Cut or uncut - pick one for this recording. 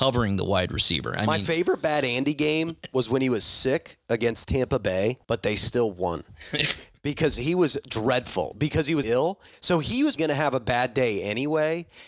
cut